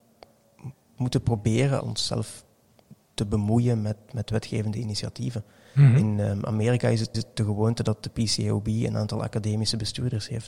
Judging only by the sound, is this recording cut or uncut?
cut